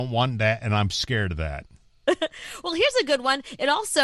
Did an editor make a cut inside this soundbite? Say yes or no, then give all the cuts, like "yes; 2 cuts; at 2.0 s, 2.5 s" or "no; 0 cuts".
no; 0 cuts